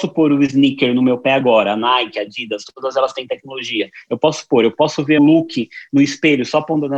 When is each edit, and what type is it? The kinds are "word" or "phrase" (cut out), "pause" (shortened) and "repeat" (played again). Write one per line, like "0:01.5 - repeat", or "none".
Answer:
0:05.2 - word